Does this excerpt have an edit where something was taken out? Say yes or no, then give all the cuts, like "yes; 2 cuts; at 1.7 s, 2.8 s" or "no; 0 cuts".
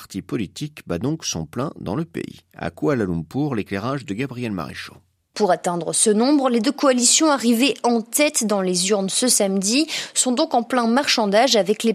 no; 0 cuts